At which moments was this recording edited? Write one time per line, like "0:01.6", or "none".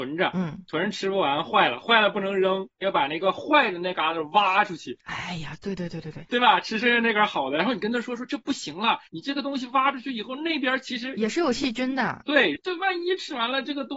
0:06.3
0:09.1